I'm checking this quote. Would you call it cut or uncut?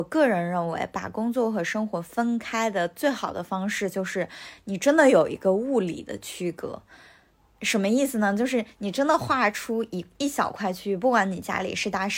uncut